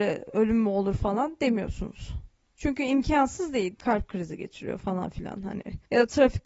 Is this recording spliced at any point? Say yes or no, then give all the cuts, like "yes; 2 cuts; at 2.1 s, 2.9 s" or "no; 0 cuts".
no; 0 cuts